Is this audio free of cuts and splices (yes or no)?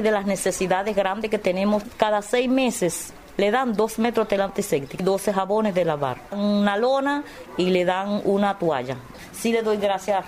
yes